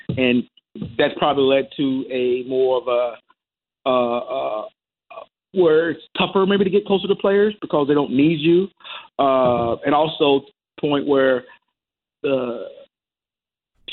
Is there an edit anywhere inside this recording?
no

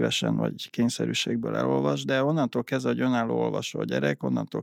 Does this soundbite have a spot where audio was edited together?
no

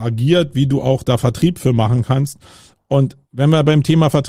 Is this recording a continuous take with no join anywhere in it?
no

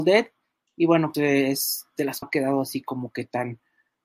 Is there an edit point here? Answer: yes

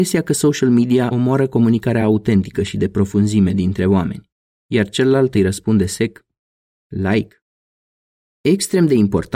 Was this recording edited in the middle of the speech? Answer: no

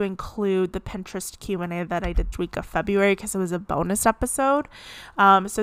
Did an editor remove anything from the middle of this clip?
yes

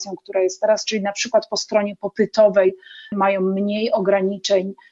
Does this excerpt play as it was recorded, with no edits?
yes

